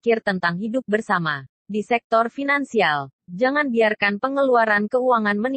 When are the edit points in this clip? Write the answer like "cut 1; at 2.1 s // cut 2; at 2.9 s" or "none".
cut 1; at 1.5 s